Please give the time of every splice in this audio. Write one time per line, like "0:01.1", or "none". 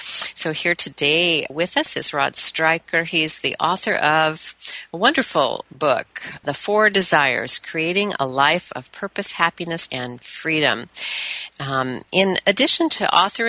0:01.5
0:06.4
0:09.9